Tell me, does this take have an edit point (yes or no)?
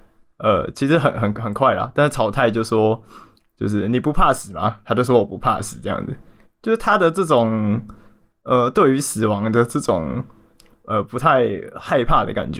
no